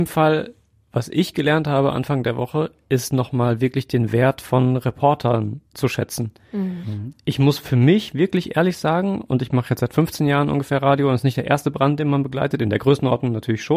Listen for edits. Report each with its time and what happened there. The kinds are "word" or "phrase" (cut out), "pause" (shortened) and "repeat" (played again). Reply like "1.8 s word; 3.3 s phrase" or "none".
5.7 s pause